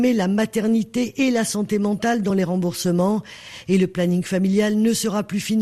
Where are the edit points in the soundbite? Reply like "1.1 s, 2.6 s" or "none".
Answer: none